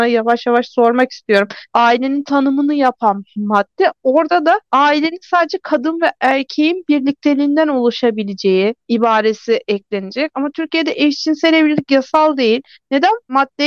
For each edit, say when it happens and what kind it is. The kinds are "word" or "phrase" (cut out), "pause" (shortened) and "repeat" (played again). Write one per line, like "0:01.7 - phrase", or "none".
0:01.7 - pause
0:04.6 - pause
0:08.8 - pause